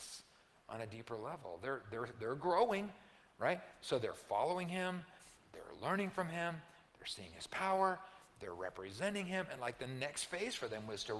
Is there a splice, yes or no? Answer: no